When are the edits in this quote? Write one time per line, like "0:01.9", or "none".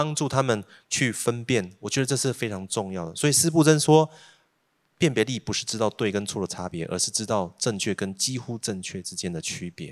none